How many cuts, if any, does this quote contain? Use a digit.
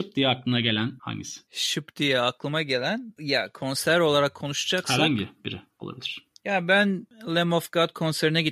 0